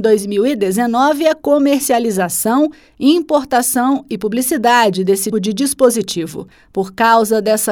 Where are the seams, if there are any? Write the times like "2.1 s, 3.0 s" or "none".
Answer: 5.3 s